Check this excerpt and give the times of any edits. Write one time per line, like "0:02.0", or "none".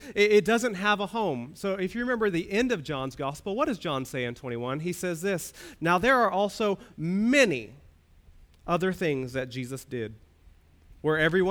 none